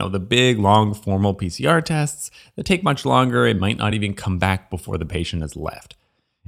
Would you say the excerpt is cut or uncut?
uncut